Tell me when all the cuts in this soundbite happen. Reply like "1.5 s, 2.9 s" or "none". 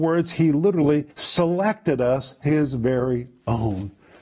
1.1 s, 2.4 s